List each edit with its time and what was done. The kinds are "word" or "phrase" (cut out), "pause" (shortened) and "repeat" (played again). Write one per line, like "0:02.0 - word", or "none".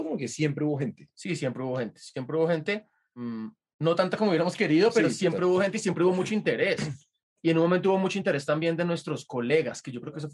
none

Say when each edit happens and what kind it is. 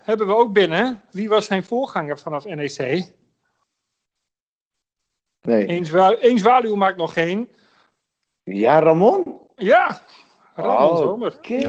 none

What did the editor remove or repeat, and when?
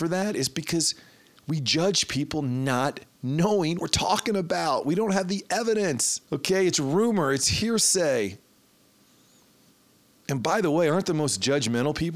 0:03.8 - word
0:06.2 - pause

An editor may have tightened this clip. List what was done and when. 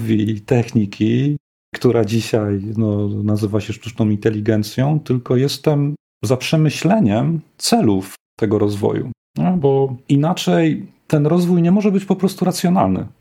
none

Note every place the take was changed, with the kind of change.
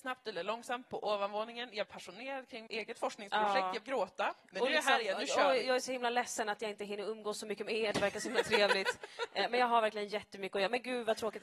0:01.9 - word
0:02.7 - word
0:03.8 - word

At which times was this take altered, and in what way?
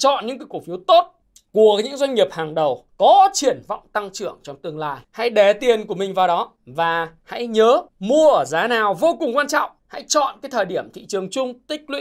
0:01.2 - pause
0:02.9 - pause
0:05.0 - pause
0:06.6 - pause
0:07.9 - pause
0:09.8 - pause

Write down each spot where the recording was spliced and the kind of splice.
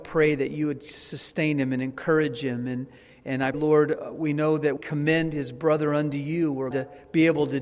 0:03.5 - word
0:04.8 - word
0:06.7 - word

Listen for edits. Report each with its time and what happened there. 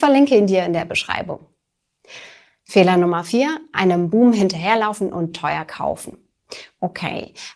none

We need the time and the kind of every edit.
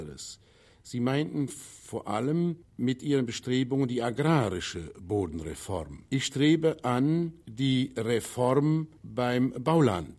0:02.6 - pause
0:06.1 - pause
0:07.4 - pause
0:09.0 - pause

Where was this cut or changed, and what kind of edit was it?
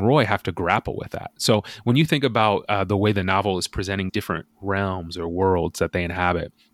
0:04.1 - word

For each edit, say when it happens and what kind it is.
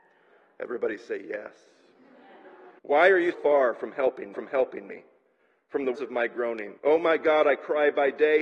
0:02.8 - pause
0:03.3 - word
0:04.3 - repeat
0:05.9 - word
0:06.8 - pause

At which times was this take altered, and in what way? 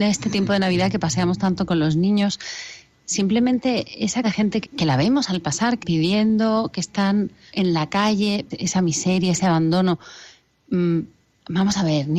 0:04.2 - word
0:04.6 - word
0:05.8 - word
0:07.5 - word
0:08.5 - word

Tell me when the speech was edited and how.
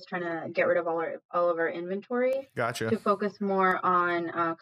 none

